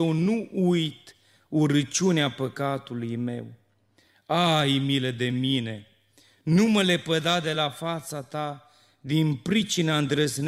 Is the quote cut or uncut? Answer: uncut